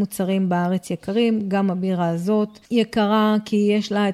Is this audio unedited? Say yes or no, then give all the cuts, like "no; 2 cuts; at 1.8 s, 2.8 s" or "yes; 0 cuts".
yes; 0 cuts